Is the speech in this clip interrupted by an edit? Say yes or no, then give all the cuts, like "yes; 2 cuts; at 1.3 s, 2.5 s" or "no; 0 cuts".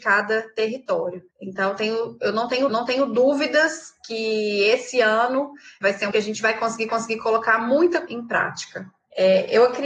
yes; 5 cuts; at 1.3 s, 2.7 s, 6.1 s, 6.9 s, 8.1 s